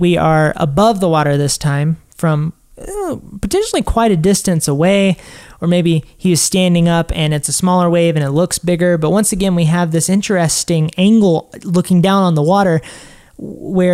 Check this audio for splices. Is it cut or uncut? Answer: uncut